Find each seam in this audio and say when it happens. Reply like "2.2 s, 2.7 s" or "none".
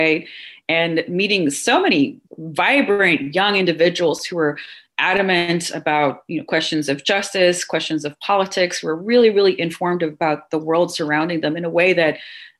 2.3 s